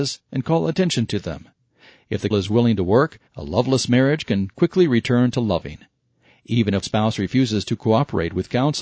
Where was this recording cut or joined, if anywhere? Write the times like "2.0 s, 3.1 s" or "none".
2.3 s, 3.3 s, 6.8 s